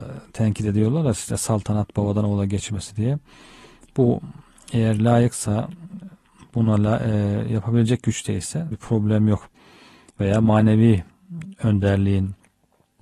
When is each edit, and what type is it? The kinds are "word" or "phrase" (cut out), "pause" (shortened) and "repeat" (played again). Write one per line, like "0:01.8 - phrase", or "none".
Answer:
0:08.7 - word

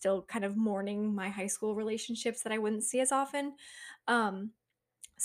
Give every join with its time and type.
none

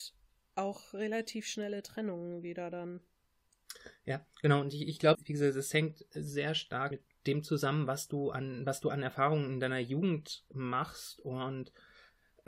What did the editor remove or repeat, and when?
0:05.1 - word
0:06.9 - word

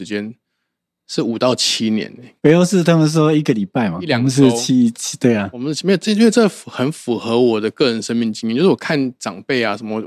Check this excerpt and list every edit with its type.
0:02.4 - word

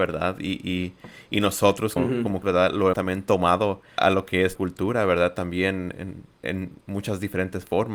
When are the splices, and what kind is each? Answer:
0:02.0 - word
0:02.4 - word
0:02.9 - word
0:04.0 - word
0:04.5 - word
0:06.4 - word

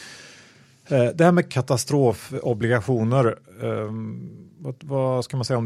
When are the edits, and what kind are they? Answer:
0:01.5 - phrase

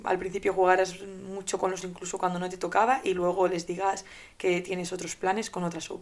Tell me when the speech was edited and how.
0:01.8 - word

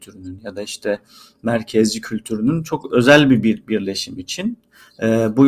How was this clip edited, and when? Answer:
none

